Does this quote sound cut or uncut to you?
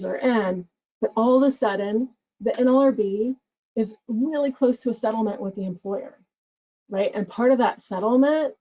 uncut